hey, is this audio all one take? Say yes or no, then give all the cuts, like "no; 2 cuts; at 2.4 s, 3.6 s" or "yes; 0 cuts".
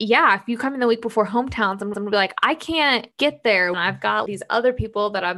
no; 4 cuts; at 1.9 s, 3.1 s, 3.7 s, 4.3 s